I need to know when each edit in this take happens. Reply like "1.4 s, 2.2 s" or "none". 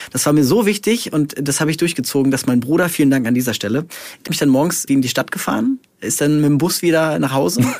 4.3 s, 4.9 s